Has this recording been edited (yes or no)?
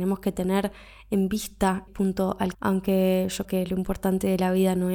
yes